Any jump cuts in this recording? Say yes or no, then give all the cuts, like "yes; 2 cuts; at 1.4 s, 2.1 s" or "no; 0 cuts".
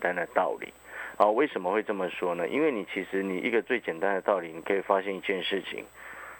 no; 0 cuts